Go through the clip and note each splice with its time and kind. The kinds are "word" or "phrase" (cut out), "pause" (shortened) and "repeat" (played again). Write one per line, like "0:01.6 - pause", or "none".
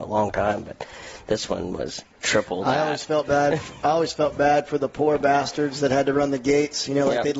0:02.1 - pause